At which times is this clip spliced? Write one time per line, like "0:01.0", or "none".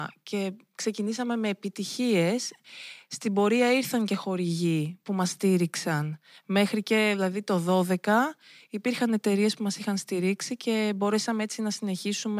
none